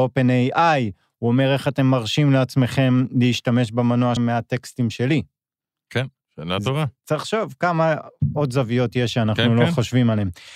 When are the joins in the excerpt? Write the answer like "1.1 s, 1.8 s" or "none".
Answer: 4.2 s

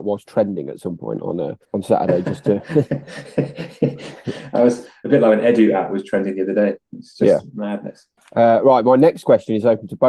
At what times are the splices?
1.6 s, 8.2 s

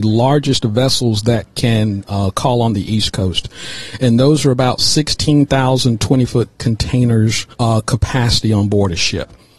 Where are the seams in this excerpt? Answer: 7.5 s

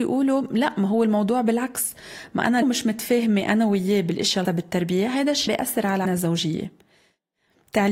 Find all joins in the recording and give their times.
2.6 s, 4.4 s, 5.5 s, 6.0 s

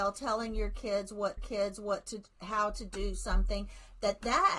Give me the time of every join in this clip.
1.4 s

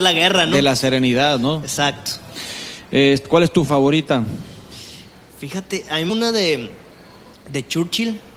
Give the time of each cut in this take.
3.7 s, 6.1 s

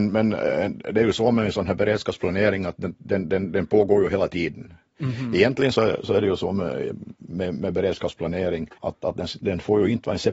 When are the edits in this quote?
8.8 s

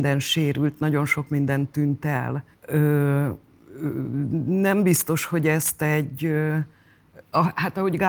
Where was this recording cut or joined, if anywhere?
2.5 s

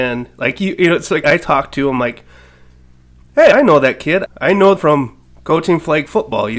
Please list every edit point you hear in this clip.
1.2 s, 3.5 s, 4.3 s, 4.8 s

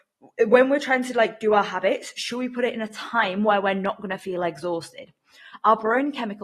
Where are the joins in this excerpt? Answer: none

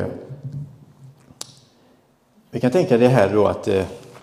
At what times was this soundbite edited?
none

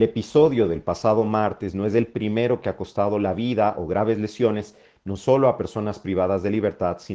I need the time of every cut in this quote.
none

